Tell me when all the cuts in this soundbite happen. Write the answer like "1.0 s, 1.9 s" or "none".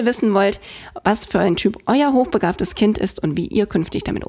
none